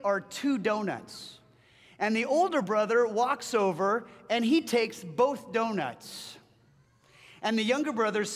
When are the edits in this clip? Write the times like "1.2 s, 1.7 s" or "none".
none